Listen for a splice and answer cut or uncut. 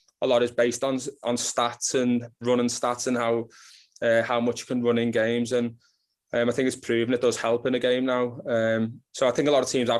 cut